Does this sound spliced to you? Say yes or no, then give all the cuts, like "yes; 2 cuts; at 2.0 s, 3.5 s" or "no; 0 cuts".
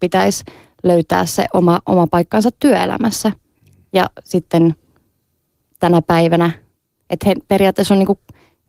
no; 0 cuts